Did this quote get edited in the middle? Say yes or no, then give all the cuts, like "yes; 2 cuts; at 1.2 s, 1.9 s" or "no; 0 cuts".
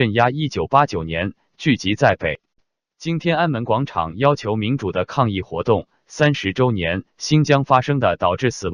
no; 0 cuts